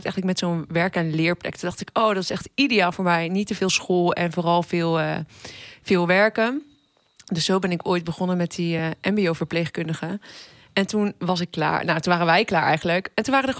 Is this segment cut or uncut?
uncut